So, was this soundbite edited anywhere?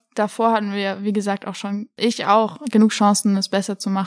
no; 0 cuts

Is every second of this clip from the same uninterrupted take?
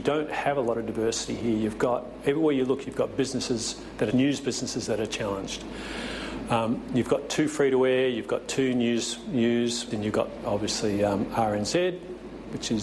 no; 2 cuts; at 4.1 s, 9.9 s

